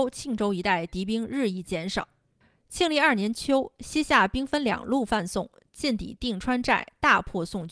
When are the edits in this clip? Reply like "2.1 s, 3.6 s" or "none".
none